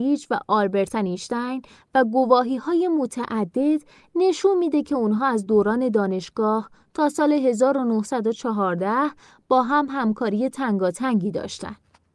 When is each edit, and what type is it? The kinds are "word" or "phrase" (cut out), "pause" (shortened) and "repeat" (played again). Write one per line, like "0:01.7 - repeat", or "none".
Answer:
none